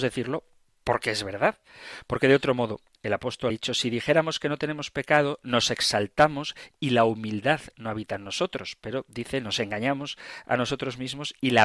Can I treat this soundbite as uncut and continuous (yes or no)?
no